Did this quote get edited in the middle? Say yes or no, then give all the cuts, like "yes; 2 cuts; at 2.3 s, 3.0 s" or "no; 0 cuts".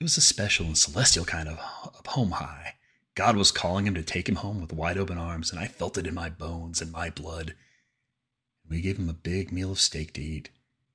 no; 0 cuts